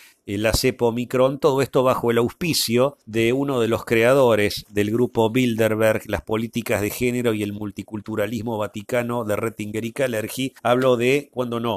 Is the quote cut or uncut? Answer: cut